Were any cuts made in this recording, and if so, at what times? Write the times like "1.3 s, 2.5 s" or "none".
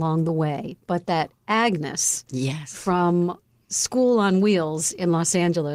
none